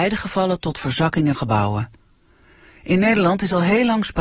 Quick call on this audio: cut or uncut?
cut